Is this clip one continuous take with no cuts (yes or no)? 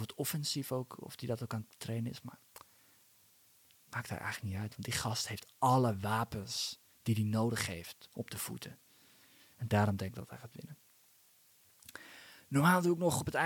yes